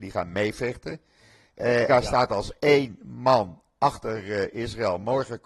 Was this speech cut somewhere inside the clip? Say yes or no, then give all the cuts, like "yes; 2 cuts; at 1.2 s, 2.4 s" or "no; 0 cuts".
yes; 1 cut; at 1.9 s